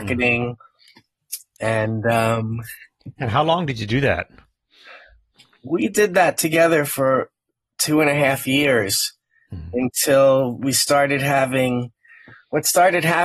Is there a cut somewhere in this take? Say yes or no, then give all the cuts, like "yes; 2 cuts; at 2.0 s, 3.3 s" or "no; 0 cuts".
no; 0 cuts